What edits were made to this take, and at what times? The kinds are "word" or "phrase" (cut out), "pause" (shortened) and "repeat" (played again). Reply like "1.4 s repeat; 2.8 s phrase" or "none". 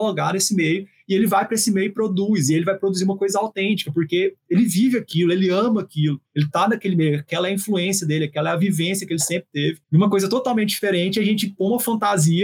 6.3 s pause; 9.8 s pause